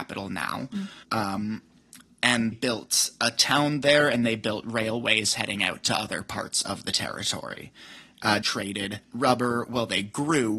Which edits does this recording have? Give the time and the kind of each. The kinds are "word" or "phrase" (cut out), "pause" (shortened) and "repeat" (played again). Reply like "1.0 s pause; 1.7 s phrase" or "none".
1.0 s pause; 2.5 s word; 8.4 s phrase; 9.0 s pause